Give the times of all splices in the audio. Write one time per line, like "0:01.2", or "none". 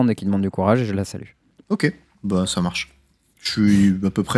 none